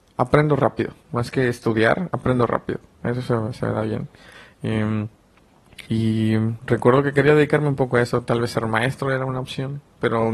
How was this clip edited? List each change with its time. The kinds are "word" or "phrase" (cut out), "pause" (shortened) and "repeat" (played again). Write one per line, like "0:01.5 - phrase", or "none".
0:01.0 - pause
0:05.8 - pause